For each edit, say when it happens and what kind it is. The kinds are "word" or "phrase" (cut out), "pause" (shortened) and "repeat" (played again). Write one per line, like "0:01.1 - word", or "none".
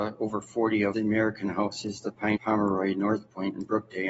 0:00.9 - phrase
0:02.4 - phrase